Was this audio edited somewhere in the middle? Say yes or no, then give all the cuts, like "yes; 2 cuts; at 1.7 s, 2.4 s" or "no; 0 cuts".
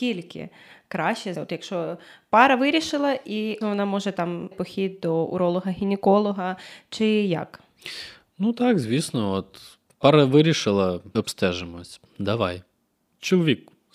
yes; 4 cuts; at 1.3 s, 3.6 s, 4.5 s, 11.1 s